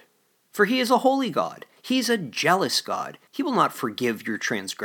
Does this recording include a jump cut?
yes; 1 cut; at 3.3 s

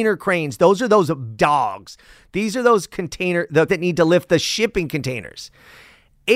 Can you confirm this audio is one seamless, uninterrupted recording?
no; 2 cuts; at 1.4 s, 3.7 s

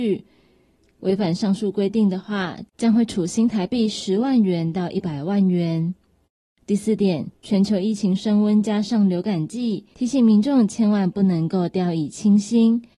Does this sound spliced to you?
yes; 4 cuts; at 2.7 s, 6.2 s, 7.3 s, 9.9 s

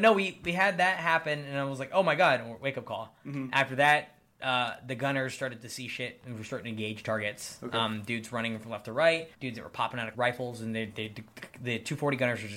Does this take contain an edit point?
yes; 2 cuts; at 9.3 s, 10.1 s

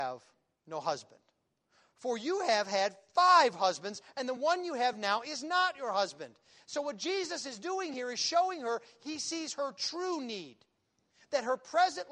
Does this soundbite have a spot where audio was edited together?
no; 0 cuts

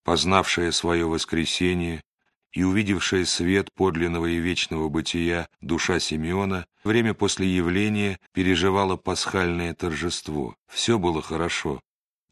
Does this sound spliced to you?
yes; 4 cuts; at 5.5 s, 6.9 s, 8.3 s, 10.6 s

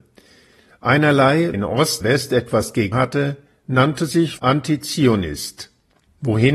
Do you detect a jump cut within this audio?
yes; 4 cuts; at 1.5 s, 2.0 s, 2.9 s, 4.4 s

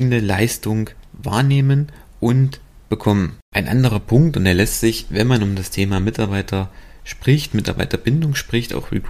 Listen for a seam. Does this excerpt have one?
yes; 1 cut; at 3.4 s

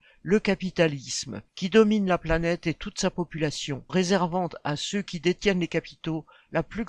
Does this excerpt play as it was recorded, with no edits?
no; 2 cuts; at 1.5 s, 3.9 s

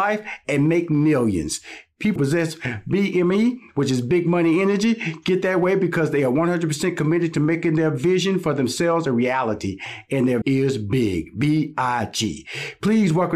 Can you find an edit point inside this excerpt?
yes; 2 cuts; at 2.2 s, 10.4 s

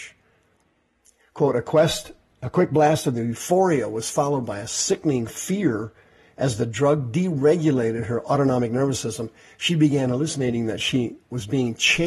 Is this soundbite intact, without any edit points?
yes; 0 cuts

